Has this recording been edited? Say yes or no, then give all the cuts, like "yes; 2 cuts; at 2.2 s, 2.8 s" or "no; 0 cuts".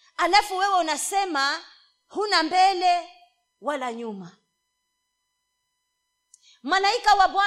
no; 0 cuts